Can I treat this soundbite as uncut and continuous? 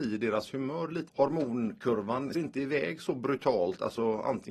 no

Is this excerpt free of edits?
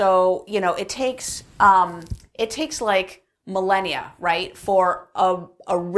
yes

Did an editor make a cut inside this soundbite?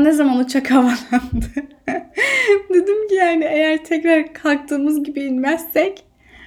no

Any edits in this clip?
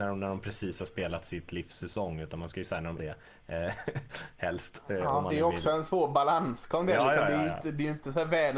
yes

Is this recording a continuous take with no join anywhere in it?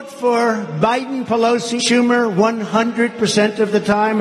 no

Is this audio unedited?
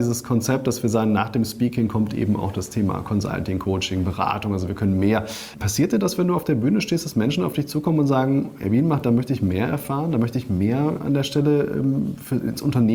yes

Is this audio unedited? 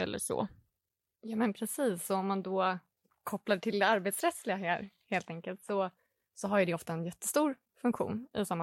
yes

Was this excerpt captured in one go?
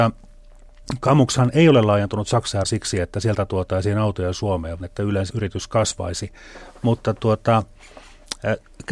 no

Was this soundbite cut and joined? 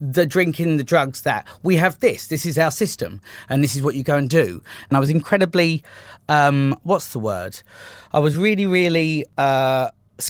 no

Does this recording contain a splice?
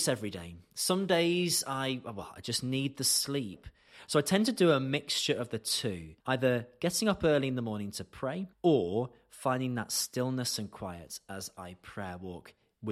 yes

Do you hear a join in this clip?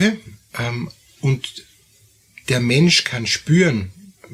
no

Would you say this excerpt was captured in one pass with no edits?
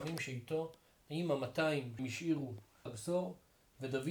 no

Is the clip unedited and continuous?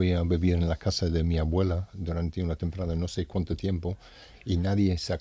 yes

